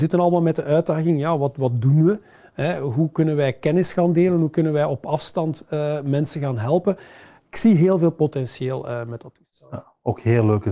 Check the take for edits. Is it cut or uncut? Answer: uncut